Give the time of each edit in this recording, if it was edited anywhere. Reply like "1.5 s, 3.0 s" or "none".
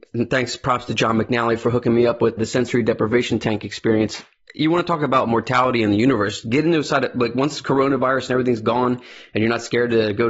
2.4 s